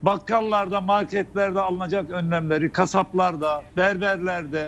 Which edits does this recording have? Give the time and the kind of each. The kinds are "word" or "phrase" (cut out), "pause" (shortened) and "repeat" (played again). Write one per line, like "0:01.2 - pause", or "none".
0:03.7 - pause